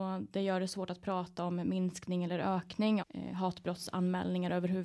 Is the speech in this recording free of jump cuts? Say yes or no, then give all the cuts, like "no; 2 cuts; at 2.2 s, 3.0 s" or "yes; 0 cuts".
no; 1 cut; at 3.0 s